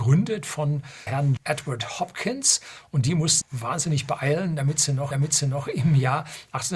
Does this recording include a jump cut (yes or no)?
yes